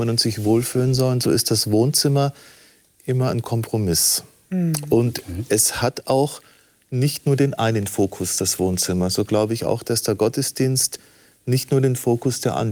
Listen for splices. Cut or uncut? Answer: uncut